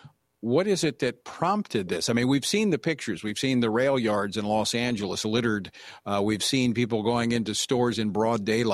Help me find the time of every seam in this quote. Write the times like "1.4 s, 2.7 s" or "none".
none